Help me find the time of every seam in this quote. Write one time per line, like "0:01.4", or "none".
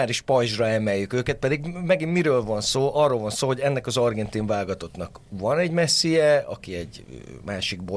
none